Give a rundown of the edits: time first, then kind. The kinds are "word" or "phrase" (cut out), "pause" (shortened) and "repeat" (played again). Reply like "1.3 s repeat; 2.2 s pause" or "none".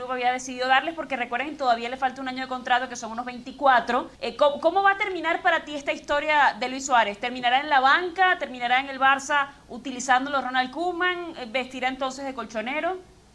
4.1 s pause